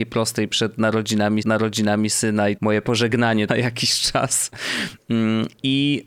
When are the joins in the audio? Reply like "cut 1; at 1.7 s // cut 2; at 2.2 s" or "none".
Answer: cut 1; at 1.4 s // cut 2; at 2.6 s // cut 3; at 3.5 s